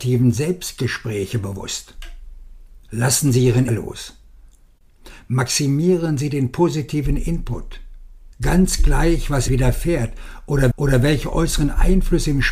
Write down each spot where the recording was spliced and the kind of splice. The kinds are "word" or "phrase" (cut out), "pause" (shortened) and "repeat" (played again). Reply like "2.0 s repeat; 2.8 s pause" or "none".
2.8 s pause; 3.7 s word; 8.3 s pause; 9.5 s word; 10.7 s repeat